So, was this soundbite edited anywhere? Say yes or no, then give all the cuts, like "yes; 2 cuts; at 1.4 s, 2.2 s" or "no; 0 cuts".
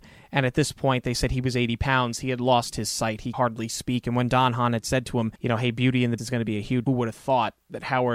yes; 4 cuts; at 3.3 s, 5.4 s, 6.2 s, 6.9 s